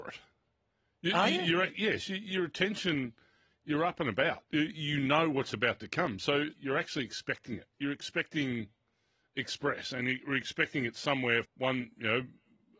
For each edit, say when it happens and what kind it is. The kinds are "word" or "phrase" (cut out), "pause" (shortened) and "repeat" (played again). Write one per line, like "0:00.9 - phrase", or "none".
0:06.5 - word
0:11.4 - word